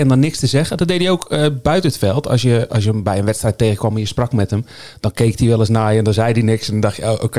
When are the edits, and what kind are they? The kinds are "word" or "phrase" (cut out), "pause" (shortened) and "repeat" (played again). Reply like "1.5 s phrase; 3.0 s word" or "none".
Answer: none